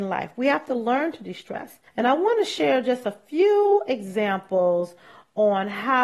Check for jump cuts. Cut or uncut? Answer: cut